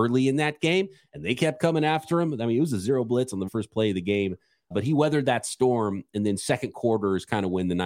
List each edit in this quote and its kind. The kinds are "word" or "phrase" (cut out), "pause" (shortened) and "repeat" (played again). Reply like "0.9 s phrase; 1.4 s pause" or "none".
3.5 s word; 4.7 s word